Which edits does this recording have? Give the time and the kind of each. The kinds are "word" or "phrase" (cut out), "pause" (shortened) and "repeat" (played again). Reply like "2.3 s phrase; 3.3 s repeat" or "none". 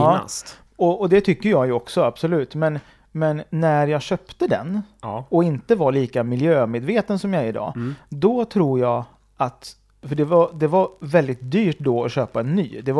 none